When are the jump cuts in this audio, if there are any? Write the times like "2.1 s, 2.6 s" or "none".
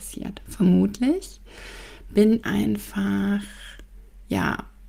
2.4 s